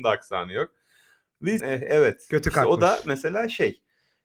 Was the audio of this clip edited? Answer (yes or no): yes